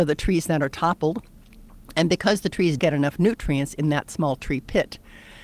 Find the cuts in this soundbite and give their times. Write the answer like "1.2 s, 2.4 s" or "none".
2.8 s

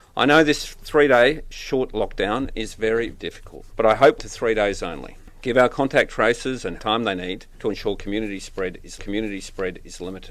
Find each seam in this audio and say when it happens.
3.1 s, 3.7 s, 4.2 s, 6.8 s, 7.5 s, 9.0 s

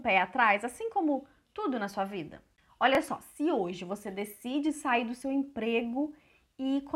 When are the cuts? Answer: none

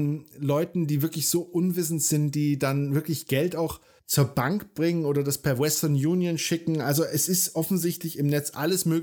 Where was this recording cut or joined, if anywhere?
4.0 s

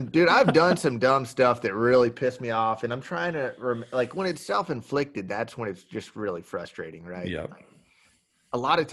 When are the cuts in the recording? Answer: none

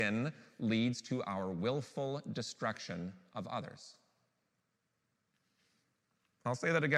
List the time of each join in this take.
none

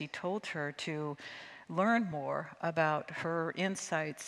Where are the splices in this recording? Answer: none

